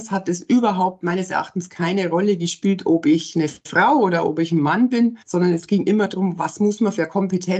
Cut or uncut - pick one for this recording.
cut